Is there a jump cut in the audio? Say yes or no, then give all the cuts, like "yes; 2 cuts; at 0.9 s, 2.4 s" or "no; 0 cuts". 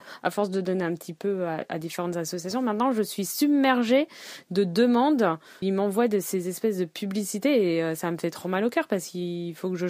yes; 1 cut; at 5.6 s